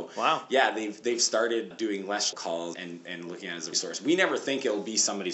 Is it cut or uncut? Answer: cut